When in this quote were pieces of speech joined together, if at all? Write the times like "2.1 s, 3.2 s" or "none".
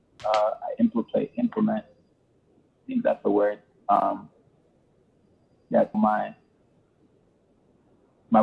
5.9 s

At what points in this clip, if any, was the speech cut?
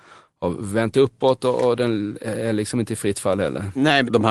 none

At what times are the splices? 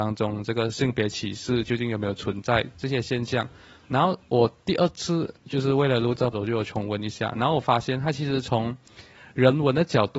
6.3 s

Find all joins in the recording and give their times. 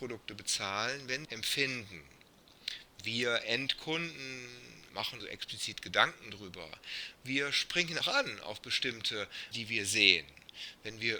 1.2 s, 4.9 s, 5.2 s, 8.0 s, 9.5 s

